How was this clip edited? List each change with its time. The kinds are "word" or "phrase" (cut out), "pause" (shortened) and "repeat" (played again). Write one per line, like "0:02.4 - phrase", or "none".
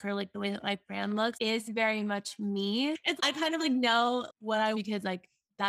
0:01.3 - word
0:03.2 - word
0:04.3 - word
0:04.7 - word